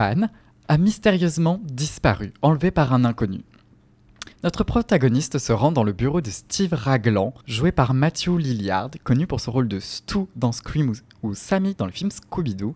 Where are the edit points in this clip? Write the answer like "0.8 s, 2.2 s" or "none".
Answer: 4.3 s, 7.4 s